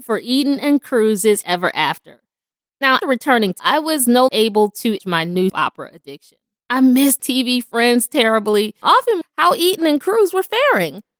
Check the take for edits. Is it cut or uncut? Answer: cut